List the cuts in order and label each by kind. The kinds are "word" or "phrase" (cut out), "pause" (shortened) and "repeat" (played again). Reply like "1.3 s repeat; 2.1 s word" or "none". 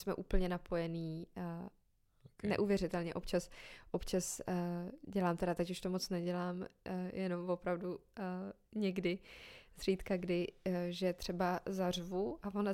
none